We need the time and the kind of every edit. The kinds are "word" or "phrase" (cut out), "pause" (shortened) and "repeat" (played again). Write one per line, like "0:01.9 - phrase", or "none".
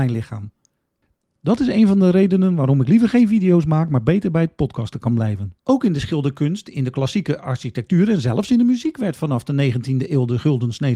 0:05.6 - pause